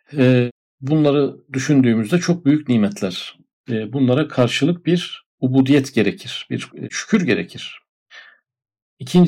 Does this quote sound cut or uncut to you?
uncut